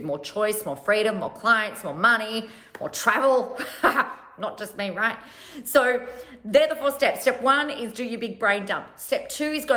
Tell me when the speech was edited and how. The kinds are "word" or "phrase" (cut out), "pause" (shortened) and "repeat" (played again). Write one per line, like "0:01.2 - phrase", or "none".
none